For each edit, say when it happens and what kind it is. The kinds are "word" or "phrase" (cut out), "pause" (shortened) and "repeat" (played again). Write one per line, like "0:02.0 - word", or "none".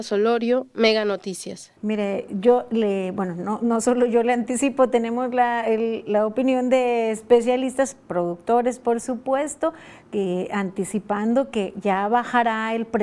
0:01.8 - pause